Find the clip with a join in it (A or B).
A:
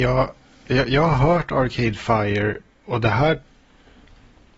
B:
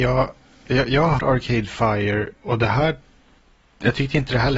B